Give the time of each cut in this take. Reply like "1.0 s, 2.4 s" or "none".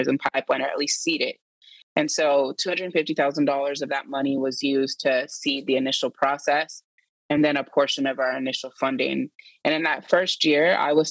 none